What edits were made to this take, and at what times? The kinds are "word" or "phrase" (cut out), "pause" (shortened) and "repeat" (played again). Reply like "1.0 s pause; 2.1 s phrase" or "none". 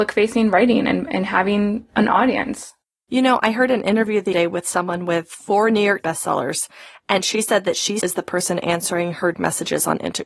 4.3 s word; 6.0 s word; 8.0 s word; 9.3 s word